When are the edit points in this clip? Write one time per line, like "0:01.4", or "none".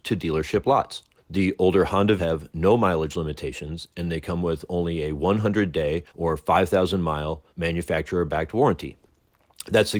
0:01.2
0:02.2
0:06.1
0:07.5